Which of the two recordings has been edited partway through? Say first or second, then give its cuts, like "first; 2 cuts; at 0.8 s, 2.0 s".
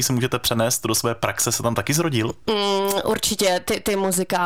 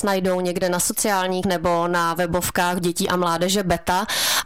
second; 2 cuts; at 1.4 s, 2.8 s